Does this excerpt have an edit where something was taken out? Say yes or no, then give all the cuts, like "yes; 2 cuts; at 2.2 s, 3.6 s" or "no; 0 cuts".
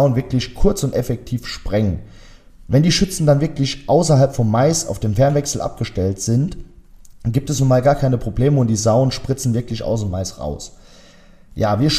no; 0 cuts